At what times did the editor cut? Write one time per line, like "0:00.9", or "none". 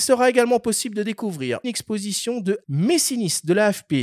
0:01.6
0:02.6